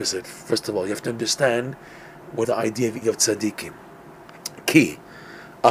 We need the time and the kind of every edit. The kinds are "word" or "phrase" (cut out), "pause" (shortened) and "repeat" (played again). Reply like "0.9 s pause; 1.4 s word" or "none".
2.4 s word; 3.0 s word